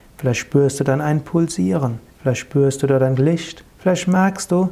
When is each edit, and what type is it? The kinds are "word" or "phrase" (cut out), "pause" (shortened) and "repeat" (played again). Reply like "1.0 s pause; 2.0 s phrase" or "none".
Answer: 2.1 s pause; 3.7 s pause